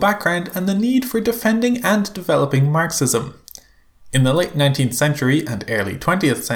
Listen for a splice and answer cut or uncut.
uncut